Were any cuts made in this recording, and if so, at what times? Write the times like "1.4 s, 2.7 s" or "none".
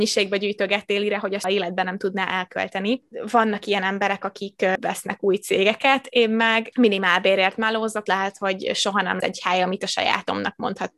1.4 s, 4.8 s, 8.1 s, 9.2 s